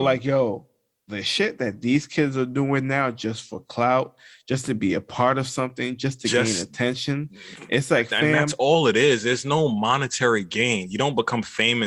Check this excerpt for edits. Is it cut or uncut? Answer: uncut